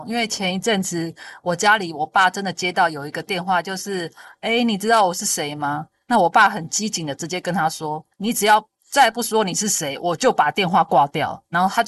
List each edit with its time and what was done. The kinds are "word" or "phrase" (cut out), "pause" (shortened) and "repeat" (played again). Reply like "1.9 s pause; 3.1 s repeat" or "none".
8.1 s pause; 8.8 s pause